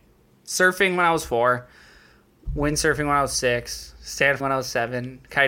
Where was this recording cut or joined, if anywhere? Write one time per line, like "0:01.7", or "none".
0:04.4